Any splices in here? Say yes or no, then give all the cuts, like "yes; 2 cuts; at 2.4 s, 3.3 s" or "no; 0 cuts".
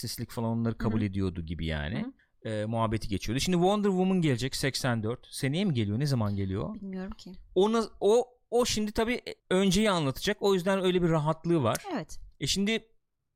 yes; 3 cuts; at 2.2 s, 9.4 s, 12.3 s